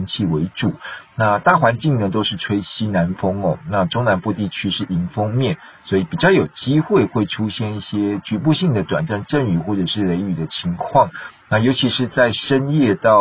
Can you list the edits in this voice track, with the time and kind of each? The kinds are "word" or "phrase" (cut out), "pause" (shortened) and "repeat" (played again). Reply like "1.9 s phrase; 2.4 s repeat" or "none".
none